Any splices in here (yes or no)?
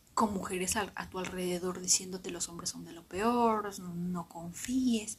no